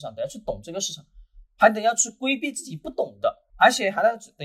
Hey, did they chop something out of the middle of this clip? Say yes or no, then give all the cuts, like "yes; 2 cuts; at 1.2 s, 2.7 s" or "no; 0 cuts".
yes; 2 cuts; at 1.5 s, 3.5 s